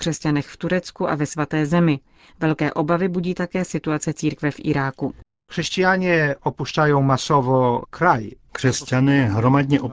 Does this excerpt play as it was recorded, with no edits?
yes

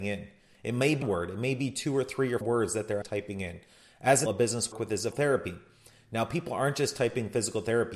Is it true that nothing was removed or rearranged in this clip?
no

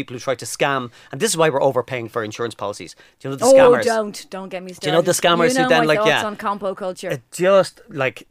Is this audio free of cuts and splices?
yes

